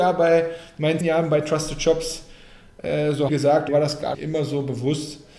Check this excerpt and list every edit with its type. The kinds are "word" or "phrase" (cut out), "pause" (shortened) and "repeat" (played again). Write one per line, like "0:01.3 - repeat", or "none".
0:01.0 - word
0:03.3 - phrase
0:03.7 - word
0:04.1 - word